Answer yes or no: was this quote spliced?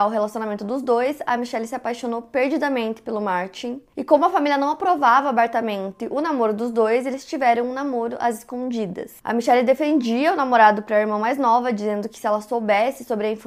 no